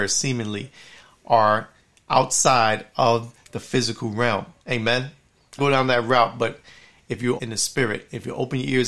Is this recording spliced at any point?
yes; 3 cuts; at 4.6 s, 5.6 s, 7.4 s

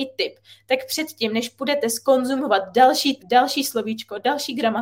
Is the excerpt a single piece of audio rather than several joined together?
no; 1 cut; at 3.2 s

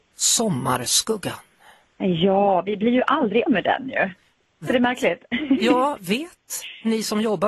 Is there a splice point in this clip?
yes; 3 cuts; at 3.5 s, 4.7 s, 6.0 s

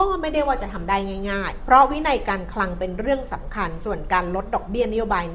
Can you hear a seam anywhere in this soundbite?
yes; 1 cut; at 1.6 s

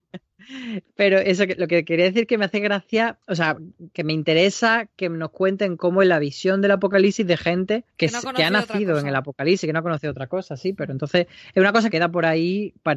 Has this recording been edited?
yes; 3 cuts; at 3.2 s, 7.9 s, 11.9 s

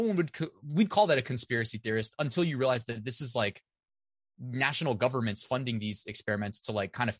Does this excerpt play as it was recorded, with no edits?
yes; 0 cuts

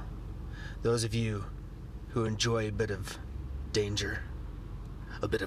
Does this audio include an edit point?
no; 0 cuts

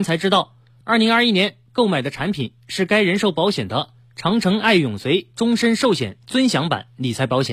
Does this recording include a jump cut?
no; 0 cuts

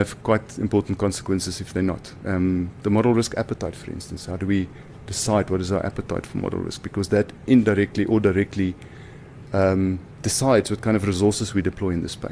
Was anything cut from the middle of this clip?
no; 0 cuts

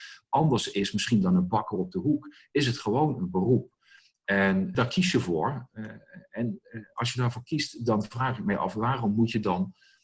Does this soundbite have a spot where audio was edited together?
no; 0 cuts

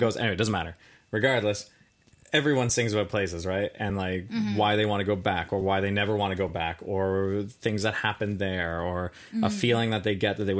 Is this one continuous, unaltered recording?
yes; 0 cuts

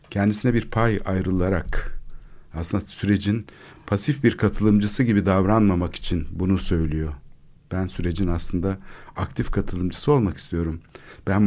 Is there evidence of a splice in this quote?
no; 0 cuts

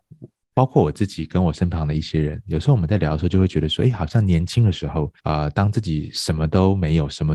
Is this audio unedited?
no; 1 cut; at 5.2 s

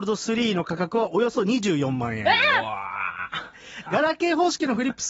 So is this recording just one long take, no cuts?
no; 1 cut; at 3.9 s

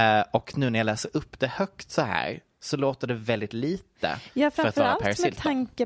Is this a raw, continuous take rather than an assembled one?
yes; 0 cuts

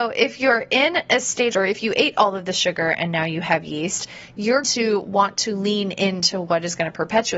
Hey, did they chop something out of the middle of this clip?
yes; 2 cuts; at 1.5 s, 4.6 s

